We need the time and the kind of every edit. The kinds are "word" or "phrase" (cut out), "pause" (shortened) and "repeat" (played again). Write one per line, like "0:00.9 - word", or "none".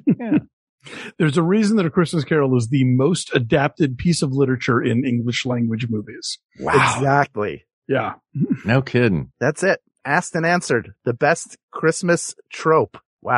none